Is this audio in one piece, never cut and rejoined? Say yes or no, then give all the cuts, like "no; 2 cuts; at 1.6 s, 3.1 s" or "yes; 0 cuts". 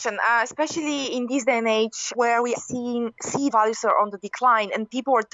no; 3 cuts; at 2.1 s, 2.5 s, 3.5 s